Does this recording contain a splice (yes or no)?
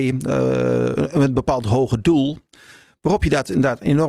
no